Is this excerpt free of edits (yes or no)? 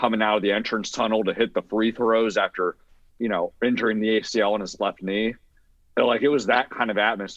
yes